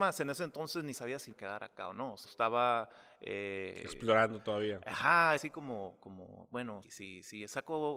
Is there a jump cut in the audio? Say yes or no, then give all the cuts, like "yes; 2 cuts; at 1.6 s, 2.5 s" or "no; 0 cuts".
yes; 5 cuts; at 0.9 s, 1.3 s, 2.2 s, 5.4 s, 6.8 s